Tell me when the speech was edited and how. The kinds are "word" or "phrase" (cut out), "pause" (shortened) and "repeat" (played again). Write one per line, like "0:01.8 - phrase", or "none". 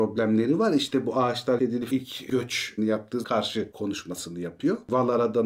0:01.6 - word
0:01.9 - word
0:02.8 - word
0:03.2 - word